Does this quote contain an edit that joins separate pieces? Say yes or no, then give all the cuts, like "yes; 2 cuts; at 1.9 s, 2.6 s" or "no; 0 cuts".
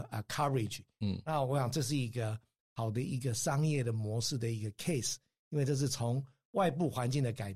no; 0 cuts